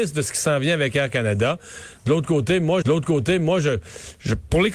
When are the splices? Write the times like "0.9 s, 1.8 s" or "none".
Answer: 2.8 s

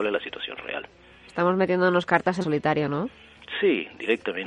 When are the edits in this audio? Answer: 2.4 s

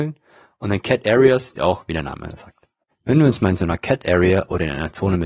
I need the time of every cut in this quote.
1.6 s, 2.9 s

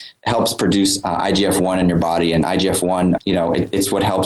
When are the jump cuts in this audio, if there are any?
3.2 s

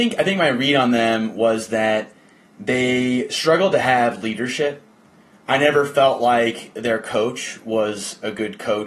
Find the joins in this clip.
none

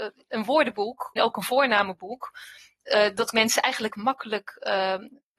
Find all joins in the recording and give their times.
1.2 s, 3.3 s, 3.9 s

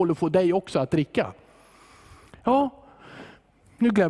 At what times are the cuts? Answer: none

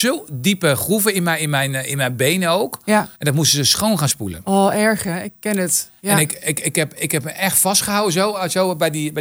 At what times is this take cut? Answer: 3.1 s, 6.0 s

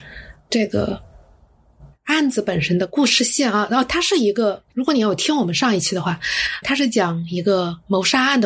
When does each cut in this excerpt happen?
4.7 s, 6.6 s

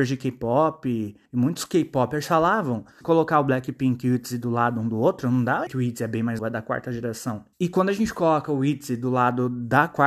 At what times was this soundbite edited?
1.3 s, 3.0 s, 5.7 s, 6.4 s, 7.5 s

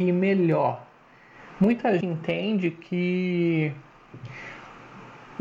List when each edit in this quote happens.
2.0 s

